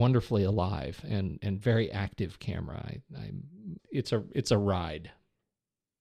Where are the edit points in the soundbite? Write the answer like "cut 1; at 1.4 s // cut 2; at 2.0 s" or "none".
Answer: cut 1; at 3.8 s